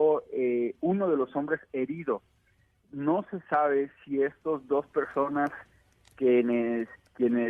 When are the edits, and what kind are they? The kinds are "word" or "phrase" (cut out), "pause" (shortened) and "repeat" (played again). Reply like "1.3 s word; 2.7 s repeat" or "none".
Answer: none